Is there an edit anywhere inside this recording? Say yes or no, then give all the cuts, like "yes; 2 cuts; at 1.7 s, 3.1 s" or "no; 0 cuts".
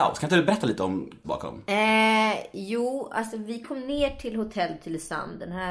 yes; 1 cut; at 1.2 s